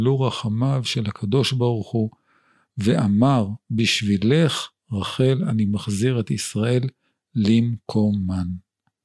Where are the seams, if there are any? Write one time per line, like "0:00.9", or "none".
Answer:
none